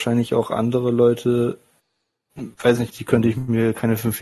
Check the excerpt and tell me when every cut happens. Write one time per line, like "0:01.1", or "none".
none